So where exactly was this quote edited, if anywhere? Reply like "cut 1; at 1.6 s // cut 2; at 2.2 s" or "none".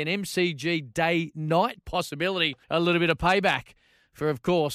cut 1; at 1.8 s // cut 2; at 2.6 s